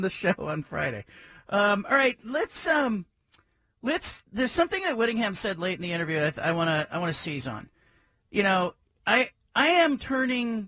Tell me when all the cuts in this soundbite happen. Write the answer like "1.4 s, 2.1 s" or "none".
none